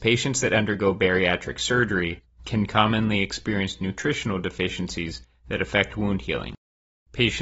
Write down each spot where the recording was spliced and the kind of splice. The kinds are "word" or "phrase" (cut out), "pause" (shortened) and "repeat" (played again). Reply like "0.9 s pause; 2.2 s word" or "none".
none